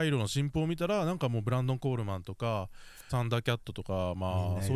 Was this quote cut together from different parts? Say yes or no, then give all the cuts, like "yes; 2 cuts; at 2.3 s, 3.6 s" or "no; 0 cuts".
yes; 1 cut; at 3.1 s